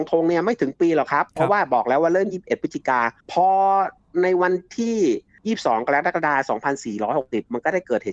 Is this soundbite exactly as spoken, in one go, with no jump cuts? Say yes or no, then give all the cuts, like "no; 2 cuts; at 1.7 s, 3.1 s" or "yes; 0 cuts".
no; 2 cuts; at 1.3 s, 3.2 s